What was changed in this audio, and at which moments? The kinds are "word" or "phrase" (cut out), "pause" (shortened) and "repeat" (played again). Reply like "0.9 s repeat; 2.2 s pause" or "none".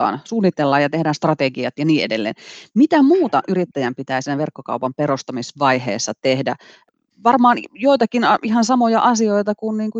none